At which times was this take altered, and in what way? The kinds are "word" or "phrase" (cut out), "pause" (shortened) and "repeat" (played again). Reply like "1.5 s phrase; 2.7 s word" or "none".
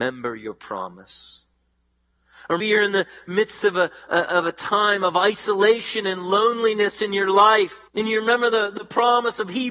2.6 s word; 7.9 s pause